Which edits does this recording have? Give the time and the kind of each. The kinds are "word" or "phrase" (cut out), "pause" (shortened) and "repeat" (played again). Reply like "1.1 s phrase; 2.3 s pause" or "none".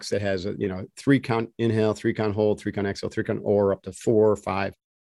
none